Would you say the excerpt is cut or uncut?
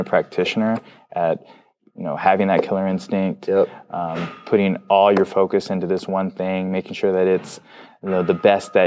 uncut